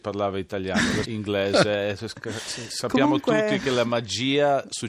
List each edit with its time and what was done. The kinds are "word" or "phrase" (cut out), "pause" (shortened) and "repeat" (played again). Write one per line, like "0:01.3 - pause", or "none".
0:01.0 - word